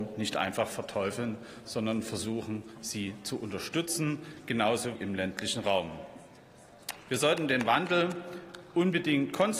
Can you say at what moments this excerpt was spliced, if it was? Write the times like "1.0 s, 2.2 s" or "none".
5.0 s